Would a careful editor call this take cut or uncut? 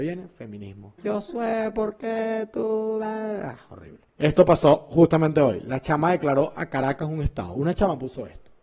cut